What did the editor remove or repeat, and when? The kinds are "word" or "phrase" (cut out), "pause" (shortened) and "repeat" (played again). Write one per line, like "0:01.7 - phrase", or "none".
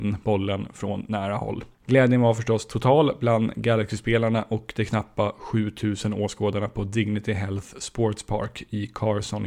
0:01.7 - pause